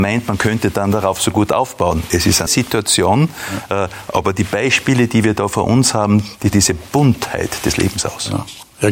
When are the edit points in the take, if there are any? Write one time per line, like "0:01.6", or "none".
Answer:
0:02.5
0:06.5